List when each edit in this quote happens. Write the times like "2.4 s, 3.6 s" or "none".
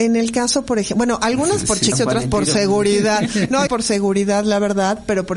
1.9 s, 3.7 s